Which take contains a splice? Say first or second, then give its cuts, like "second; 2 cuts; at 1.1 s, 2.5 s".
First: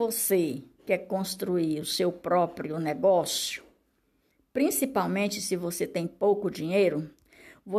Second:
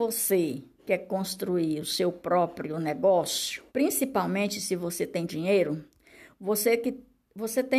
second; 2 cuts; at 3.7 s, 5.3 s